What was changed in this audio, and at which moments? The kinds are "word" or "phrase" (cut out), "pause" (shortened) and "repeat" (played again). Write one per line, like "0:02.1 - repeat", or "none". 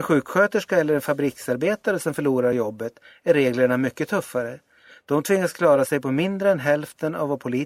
none